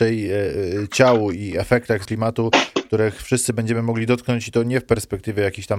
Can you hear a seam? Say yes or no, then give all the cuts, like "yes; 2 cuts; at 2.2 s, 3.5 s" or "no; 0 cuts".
yes; 1 cut; at 2.0 s